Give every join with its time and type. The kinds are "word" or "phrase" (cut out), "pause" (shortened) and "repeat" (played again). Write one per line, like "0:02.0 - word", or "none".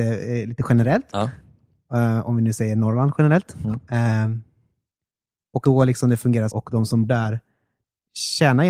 0:05.6 - word
0:06.5 - phrase
0:07.1 - word